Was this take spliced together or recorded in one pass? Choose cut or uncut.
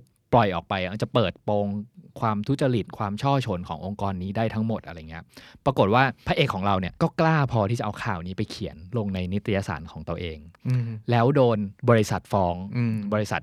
uncut